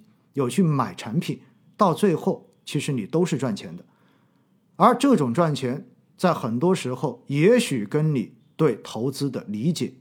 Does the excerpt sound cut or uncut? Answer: uncut